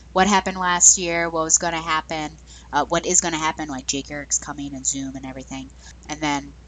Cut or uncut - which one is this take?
uncut